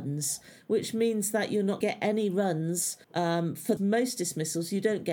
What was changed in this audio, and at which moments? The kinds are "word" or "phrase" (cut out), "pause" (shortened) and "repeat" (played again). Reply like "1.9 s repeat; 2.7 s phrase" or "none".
1.8 s phrase; 3.0 s pause; 3.8 s phrase